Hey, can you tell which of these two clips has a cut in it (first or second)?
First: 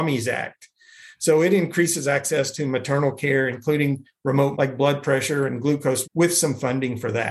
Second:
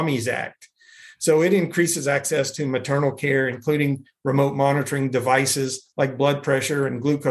first